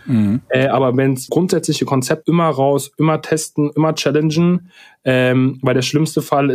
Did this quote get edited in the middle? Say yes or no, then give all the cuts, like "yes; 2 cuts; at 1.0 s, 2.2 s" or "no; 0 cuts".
yes; 2 cuts; at 1.3 s, 2.2 s